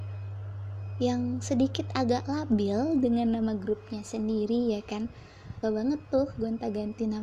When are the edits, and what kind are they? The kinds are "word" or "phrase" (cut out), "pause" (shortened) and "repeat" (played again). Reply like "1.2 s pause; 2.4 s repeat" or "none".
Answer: 5.6 s word